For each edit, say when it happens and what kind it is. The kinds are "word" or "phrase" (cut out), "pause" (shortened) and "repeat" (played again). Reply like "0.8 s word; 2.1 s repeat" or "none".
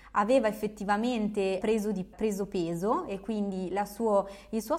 1.6 s word; 2.1 s word